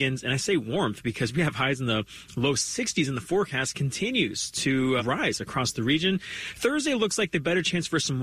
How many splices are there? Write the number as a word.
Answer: one